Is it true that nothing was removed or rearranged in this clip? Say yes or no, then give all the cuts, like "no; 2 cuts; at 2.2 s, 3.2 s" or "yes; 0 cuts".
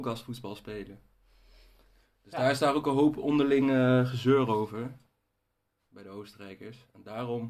yes; 0 cuts